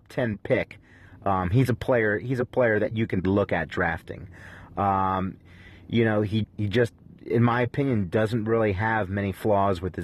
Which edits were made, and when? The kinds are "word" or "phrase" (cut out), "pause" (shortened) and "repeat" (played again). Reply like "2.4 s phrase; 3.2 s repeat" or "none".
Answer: 3.2 s word; 6.4 s word